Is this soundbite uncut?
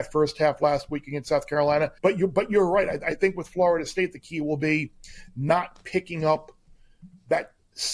no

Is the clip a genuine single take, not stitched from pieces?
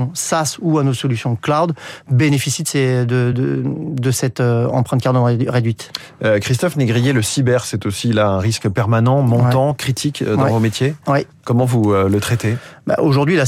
yes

